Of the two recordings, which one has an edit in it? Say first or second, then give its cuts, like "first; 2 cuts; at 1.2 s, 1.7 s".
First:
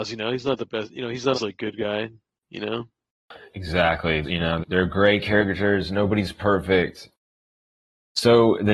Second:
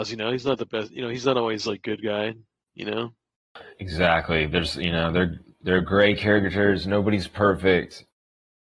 first; 3 cuts; at 1.3 s, 4.2 s, 4.6 s